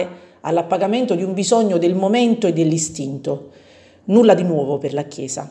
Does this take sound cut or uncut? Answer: uncut